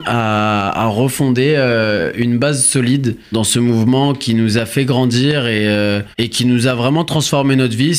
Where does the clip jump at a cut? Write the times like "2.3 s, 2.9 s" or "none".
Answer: 3.3 s, 6.1 s